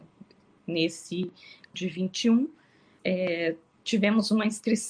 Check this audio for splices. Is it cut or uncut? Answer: cut